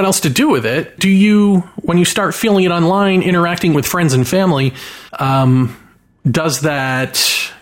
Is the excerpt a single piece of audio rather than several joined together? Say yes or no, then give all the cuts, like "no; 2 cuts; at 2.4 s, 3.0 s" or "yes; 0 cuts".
no; 3 cuts; at 1.0 s, 3.7 s, 5.1 s